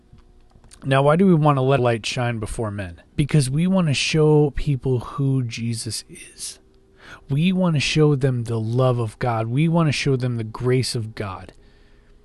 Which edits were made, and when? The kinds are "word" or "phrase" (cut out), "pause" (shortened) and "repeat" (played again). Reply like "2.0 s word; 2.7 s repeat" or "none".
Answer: 1.8 s word; 3.1 s pause